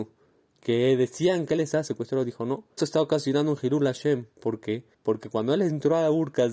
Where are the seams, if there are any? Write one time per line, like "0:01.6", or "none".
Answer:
0:02.8
0:04.3
0:04.9